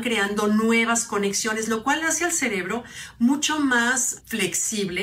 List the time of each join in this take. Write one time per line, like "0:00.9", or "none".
none